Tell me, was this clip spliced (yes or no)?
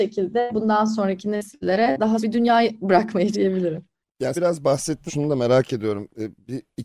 yes